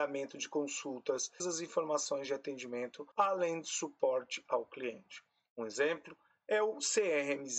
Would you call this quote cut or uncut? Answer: cut